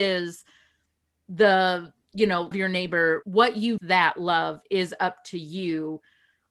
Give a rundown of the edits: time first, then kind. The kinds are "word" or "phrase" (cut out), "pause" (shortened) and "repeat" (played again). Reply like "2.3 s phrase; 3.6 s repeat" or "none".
2.5 s word; 3.2 s word; 3.8 s phrase